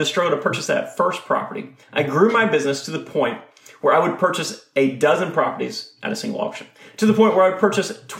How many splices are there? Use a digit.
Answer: 1